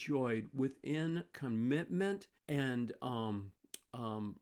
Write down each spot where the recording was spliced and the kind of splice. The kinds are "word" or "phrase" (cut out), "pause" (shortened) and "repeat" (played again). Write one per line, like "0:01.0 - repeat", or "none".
0:01.3 - word
0:02.4 - pause